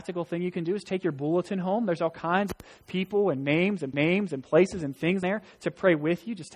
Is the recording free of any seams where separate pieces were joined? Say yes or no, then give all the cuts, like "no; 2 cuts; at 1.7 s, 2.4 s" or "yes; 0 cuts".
no; 2 cuts; at 3.9 s, 5.2 s